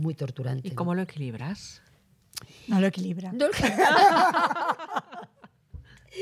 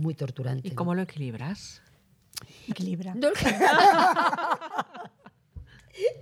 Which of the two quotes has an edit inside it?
second; 1 cut; at 2.7 s

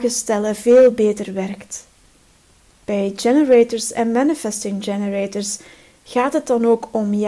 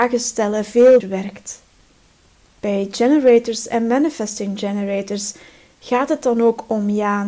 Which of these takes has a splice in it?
second; 1 cut; at 1.0 s

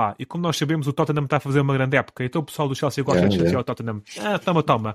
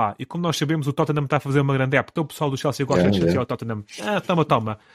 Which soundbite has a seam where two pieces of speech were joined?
second; 1 cut; at 2.2 s

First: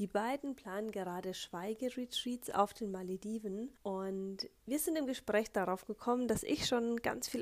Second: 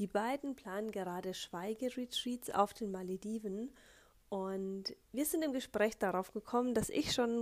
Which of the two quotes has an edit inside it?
first; 1 cut; at 3.8 s

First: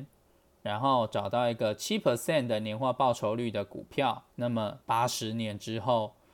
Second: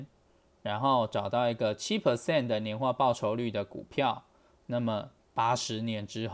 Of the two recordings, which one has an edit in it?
first; 2 cuts; at 4.3 s, 4.8 s

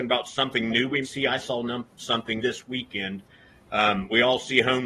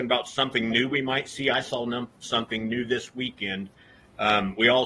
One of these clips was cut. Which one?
first; 2 cuts; at 1.0 s, 2.4 s

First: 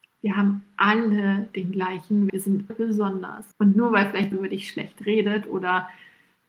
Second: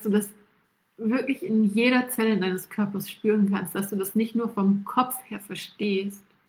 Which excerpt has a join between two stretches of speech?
first; 4 cuts; at 2.3 s, 2.7 s, 3.5 s, 4.3 s

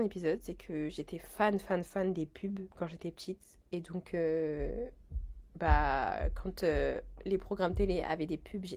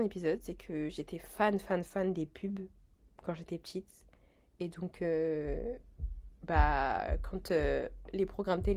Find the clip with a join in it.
first; 2 cuts; at 2.7 s, 3.6 s

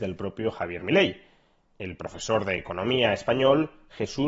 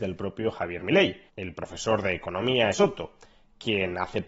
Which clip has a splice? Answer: second; 2 cuts; at 1.3 s, 2.7 s

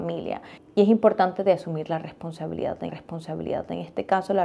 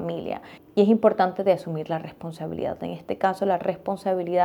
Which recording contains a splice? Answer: first; 1 cut; at 2.9 s

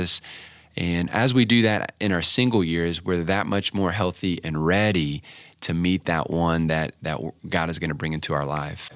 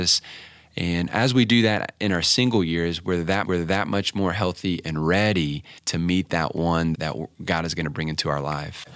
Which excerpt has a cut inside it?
second; 3 cuts; at 3.4 s, 5.8 s, 6.9 s

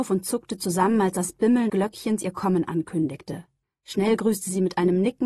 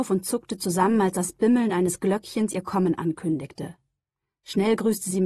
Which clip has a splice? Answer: first; 2 cuts; at 1.7 s, 3.6 s

